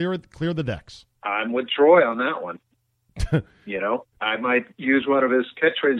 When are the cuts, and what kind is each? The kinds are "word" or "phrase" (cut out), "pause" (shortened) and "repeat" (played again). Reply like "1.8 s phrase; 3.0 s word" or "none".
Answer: 1.2 s pause; 4.1 s pause